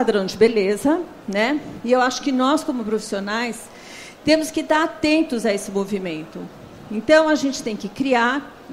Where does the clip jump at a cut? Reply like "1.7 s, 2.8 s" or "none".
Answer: none

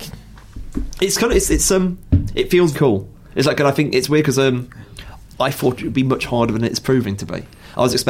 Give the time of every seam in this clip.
2.7 s

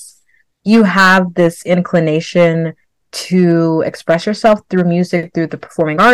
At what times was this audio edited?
none

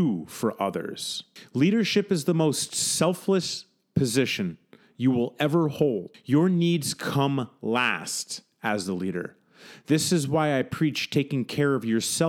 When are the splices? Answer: none

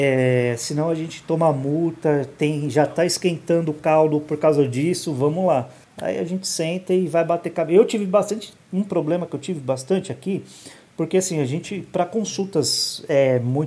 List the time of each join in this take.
8.6 s

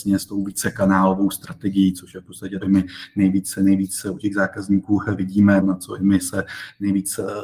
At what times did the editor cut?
2.6 s, 5.6 s

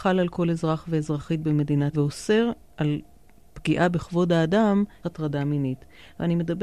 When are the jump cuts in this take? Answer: 1.9 s, 5.0 s

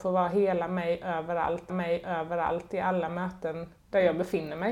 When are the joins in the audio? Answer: 1.7 s, 3.8 s

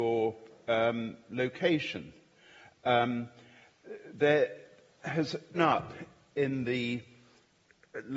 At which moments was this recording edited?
5.5 s

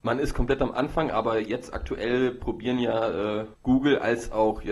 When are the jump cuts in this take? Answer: 3.5 s

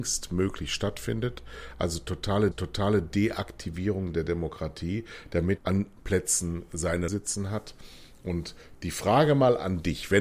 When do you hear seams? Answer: 2.5 s, 5.6 s, 6.0 s, 7.1 s

